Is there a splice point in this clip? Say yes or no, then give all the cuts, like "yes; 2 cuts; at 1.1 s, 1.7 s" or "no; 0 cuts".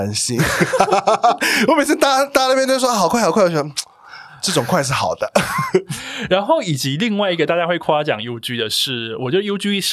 no; 0 cuts